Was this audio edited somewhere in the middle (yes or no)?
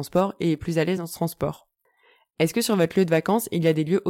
no